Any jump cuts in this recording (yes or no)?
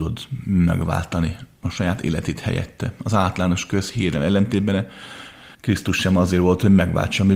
yes